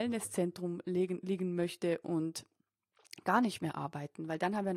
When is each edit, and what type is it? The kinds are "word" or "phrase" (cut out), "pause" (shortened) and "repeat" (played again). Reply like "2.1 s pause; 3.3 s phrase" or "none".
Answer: none